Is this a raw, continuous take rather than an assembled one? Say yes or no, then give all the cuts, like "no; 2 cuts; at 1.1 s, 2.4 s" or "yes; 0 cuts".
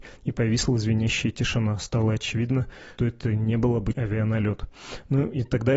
no; 2 cuts; at 3.0 s, 3.9 s